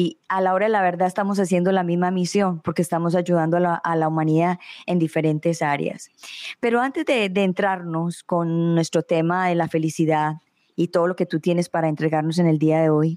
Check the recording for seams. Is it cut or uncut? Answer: uncut